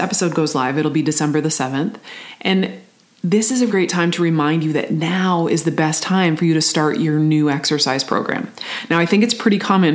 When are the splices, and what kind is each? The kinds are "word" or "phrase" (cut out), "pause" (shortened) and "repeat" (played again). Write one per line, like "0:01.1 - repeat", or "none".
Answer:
0:03.7 - word